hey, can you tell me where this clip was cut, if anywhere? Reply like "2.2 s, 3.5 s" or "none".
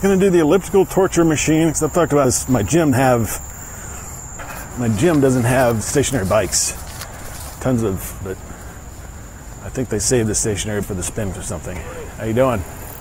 2.2 s, 2.9 s, 5.8 s, 8.2 s, 10.8 s, 11.3 s

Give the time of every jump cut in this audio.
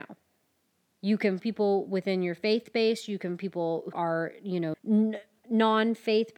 1.4 s, 3.4 s, 3.9 s, 4.7 s

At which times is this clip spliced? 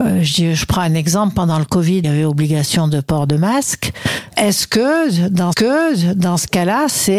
2.0 s, 5.5 s

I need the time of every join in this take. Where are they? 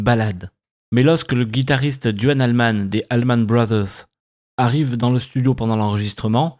none

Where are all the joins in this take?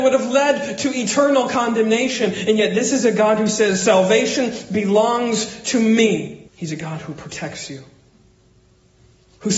6.5 s

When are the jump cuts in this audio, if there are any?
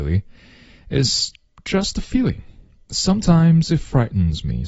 none

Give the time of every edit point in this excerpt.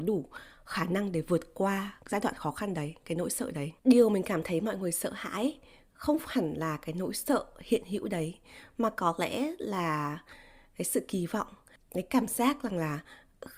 2.0 s, 3.8 s

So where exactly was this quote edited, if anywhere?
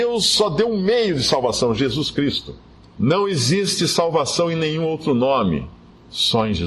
none

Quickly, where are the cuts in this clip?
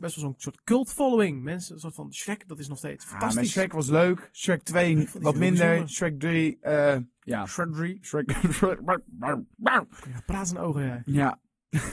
9.5 s

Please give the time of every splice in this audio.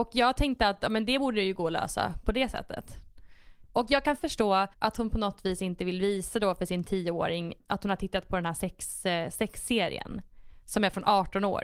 4.7 s, 7.6 s

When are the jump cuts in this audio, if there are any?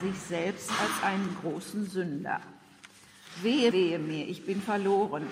3.7 s

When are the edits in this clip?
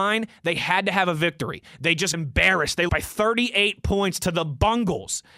2.1 s, 2.9 s

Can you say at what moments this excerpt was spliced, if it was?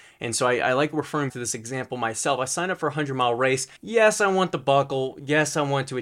1.3 s, 3.8 s

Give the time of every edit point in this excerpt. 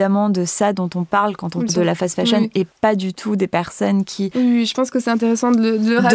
1.7 s

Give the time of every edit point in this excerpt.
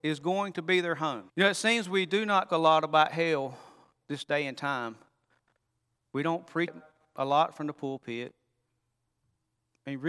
1.3 s, 2.5 s, 6.7 s

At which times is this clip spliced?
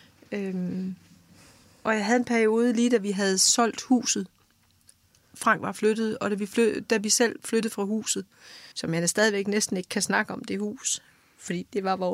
8.7 s

